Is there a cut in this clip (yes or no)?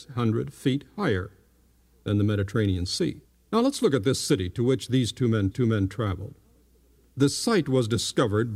yes